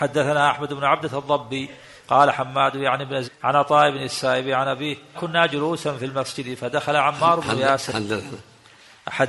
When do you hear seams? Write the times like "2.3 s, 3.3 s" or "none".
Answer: 2.3 s, 3.2 s, 5.1 s

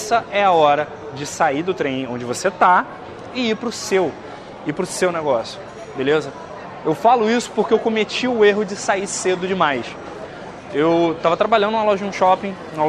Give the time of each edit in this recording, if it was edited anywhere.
none

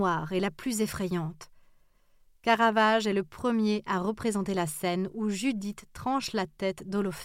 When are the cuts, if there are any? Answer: none

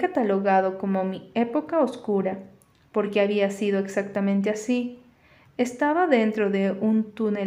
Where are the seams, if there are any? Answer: none

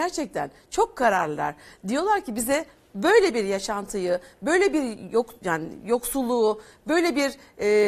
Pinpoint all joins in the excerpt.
none

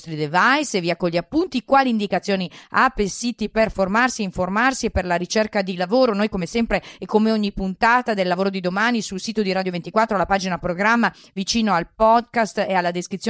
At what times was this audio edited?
none

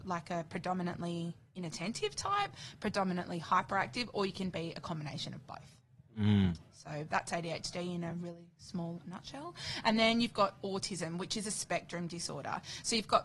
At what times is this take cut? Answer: none

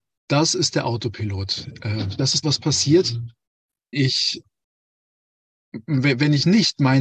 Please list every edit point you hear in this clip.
2.4 s, 3.9 s

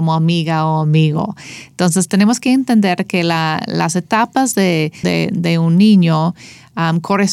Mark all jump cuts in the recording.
5.0 s

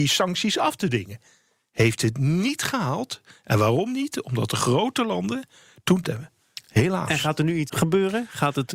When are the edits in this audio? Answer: 6.0 s, 7.7 s

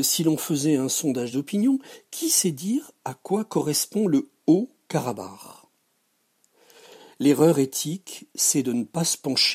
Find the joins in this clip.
none

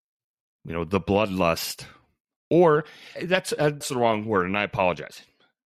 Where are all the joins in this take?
3.2 s, 3.8 s

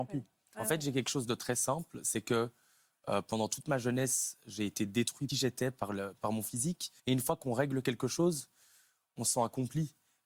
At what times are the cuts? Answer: 5.3 s, 7.0 s

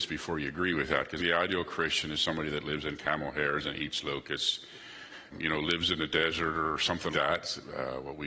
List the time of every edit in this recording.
1.2 s, 5.3 s, 7.1 s

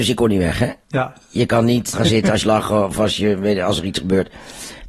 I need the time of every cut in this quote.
1.9 s, 2.4 s

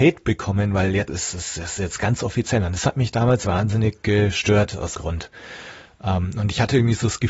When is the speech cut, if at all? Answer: 1.1 s, 3.4 s, 4.9 s

